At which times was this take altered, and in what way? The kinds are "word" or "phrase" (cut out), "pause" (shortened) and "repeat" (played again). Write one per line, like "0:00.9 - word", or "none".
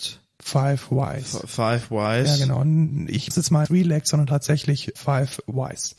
0:03.3 - word
0:03.6 - word
0:04.9 - word